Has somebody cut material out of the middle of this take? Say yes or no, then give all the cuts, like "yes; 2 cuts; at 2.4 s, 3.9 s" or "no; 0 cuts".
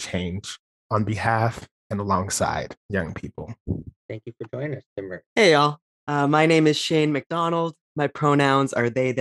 yes; 2 cuts; at 2.8 s, 4.0 s